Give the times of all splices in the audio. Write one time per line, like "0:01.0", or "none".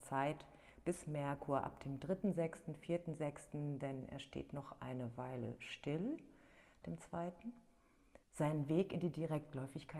0:06.8
0:08.2